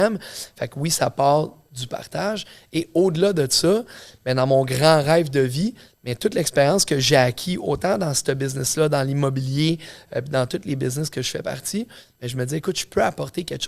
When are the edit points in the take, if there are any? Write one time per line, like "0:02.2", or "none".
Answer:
none